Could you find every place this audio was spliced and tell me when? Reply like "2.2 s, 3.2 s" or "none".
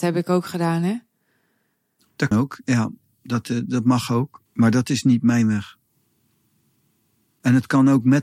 2.3 s, 4.5 s